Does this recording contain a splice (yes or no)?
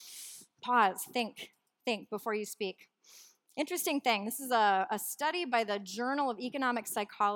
no